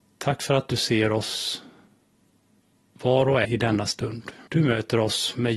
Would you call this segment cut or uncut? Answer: cut